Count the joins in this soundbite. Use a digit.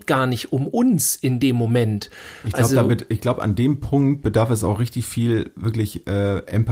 0